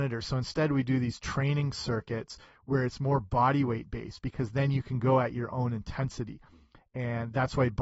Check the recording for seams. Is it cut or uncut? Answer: uncut